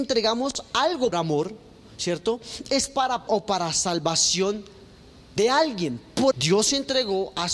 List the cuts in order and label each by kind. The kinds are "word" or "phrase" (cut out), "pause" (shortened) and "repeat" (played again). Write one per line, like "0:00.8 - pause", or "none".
0:01.1 - word
0:03.3 - word
0:06.3 - word